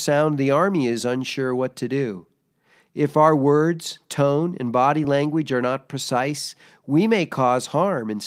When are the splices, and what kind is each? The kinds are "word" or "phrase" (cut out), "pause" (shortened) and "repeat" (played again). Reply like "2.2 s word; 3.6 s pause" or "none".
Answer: none